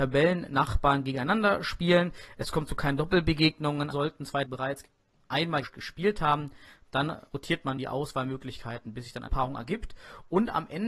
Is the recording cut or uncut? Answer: cut